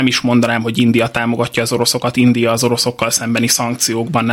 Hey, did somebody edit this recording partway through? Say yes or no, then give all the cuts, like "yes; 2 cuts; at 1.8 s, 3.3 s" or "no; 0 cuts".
no; 0 cuts